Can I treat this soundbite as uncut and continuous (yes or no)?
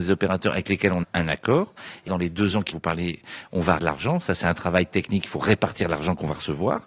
no